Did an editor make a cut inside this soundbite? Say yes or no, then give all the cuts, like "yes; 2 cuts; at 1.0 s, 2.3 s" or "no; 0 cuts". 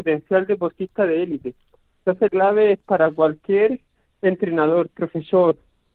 yes; 1 cut; at 2.3 s